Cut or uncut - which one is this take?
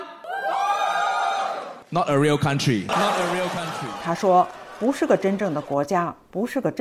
uncut